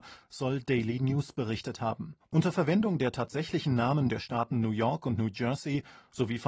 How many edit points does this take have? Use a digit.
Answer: 1